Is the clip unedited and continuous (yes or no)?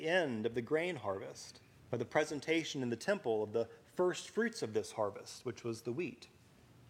no